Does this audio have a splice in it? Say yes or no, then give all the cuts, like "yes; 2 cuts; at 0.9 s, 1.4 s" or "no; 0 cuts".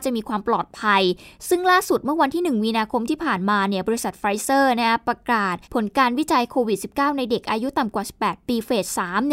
yes; 1 cut; at 5.6 s